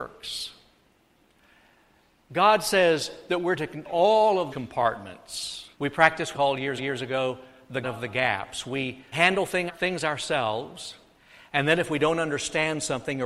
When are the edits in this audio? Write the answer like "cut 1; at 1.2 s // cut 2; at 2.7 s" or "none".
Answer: cut 1; at 3.9 s // cut 2; at 4.5 s // cut 3; at 5.7 s // cut 4; at 6.3 s // cut 5; at 6.8 s // cut 6; at 7.8 s // cut 7; at 9.1 s // cut 8; at 9.7 s